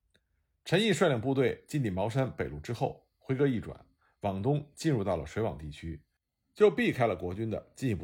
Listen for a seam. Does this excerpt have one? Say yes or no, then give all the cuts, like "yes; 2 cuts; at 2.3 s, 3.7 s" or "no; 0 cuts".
no; 0 cuts